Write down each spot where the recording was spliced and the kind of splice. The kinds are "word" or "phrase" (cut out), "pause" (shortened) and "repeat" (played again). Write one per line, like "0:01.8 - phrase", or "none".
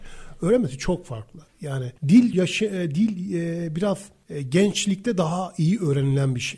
0:02.3 - word